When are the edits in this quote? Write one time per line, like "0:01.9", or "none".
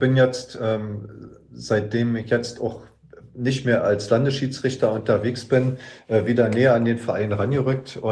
none